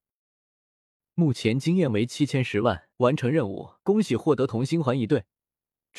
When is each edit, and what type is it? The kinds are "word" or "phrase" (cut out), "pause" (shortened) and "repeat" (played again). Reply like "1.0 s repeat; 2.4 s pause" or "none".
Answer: 2.9 s pause; 3.8 s pause